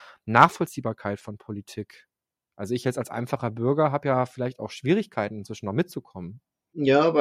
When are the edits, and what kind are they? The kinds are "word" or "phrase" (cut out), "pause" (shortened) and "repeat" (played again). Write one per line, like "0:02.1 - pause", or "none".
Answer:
none